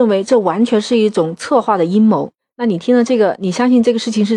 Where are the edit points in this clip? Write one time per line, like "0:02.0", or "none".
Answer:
0:02.4